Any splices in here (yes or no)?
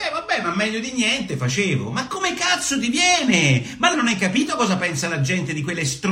yes